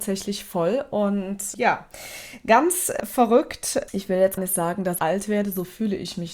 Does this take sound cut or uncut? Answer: cut